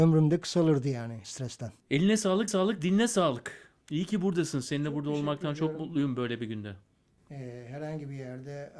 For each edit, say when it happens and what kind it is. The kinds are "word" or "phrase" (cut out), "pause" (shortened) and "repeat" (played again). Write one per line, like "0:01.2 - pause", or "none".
0:01.2 - word
0:01.8 - pause
0:02.5 - repeat
0:03.8 - pause